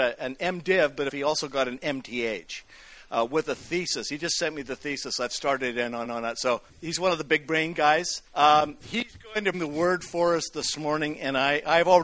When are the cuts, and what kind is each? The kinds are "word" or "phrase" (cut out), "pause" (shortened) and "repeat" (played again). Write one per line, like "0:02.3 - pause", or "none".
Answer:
0:01.1 - phrase
0:06.0 - repeat
0:06.7 - pause
0:08.3 - pause
0:09.5 - word